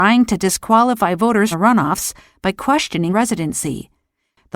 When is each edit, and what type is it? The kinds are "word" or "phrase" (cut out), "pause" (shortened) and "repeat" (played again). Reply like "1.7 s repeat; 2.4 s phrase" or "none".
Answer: 1.5 s word; 3.1 s word